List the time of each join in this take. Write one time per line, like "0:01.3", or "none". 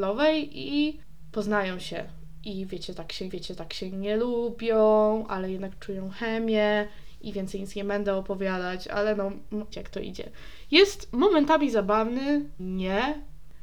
0:03.3
0:09.7
0:12.6